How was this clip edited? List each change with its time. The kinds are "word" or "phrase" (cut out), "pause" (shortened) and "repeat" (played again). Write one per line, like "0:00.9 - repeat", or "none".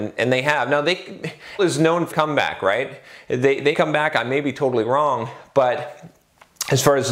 0:01.6 - word
0:02.1 - word
0:03.7 - word